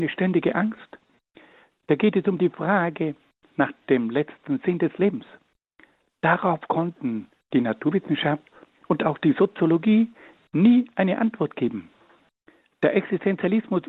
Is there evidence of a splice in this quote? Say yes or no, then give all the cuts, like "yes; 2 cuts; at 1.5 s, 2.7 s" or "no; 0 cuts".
no; 0 cuts